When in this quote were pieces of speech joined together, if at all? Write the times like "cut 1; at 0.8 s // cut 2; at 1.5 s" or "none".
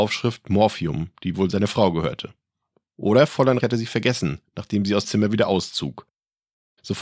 cut 1; at 3.6 s // cut 2; at 5.0 s